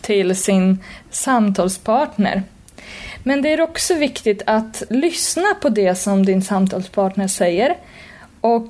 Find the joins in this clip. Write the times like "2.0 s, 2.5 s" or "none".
4.9 s